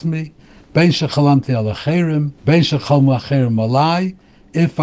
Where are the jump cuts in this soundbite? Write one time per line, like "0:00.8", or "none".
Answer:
0:02.4